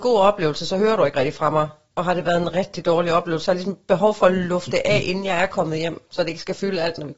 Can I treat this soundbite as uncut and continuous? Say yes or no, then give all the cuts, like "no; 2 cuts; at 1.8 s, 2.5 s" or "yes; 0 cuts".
yes; 0 cuts